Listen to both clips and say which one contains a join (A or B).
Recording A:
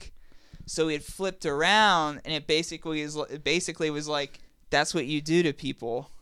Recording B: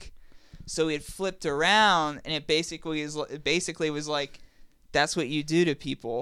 A